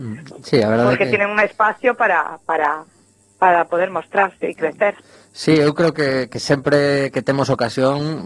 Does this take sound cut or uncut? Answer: uncut